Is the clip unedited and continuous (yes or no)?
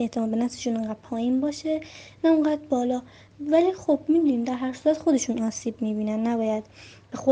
yes